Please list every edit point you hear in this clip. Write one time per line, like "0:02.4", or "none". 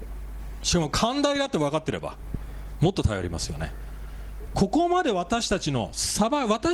0:04.5